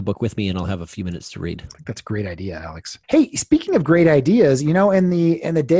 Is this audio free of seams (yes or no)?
no